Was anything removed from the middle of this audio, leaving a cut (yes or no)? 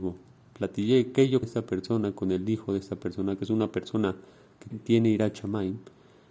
yes